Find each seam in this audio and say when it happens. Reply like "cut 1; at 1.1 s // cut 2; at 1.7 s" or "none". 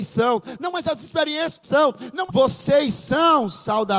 cut 1; at 1.0 s // cut 2; at 1.6 s // cut 3; at 2.3 s